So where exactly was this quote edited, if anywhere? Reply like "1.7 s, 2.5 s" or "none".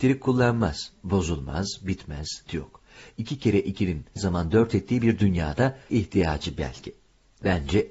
2.5 s, 4.2 s, 5.9 s